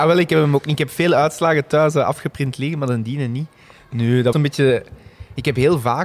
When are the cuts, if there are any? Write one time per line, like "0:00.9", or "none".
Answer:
0:04.3